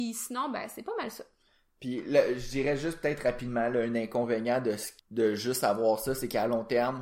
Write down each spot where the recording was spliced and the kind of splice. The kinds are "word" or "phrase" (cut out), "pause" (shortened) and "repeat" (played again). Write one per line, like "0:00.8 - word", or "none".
0:05.0 - pause